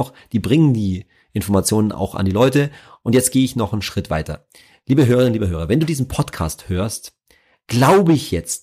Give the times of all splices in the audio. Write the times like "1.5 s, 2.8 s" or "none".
none